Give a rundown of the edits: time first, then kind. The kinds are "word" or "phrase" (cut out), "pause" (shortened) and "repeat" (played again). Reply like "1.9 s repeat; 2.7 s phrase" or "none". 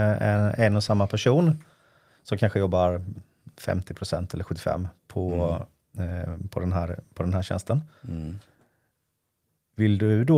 none